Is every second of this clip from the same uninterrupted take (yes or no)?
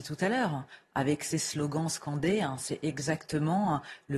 yes